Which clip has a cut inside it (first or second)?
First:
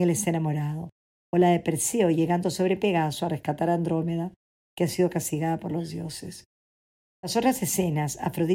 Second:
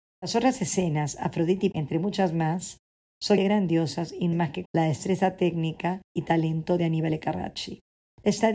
second